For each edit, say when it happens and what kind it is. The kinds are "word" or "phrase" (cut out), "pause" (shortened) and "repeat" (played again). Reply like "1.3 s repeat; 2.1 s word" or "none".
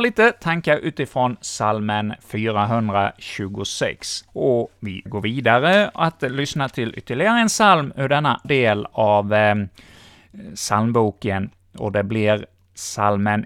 4.3 s pause; 5.1 s word; 8.4 s word